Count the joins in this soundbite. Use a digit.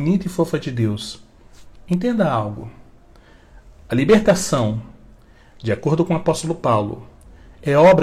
0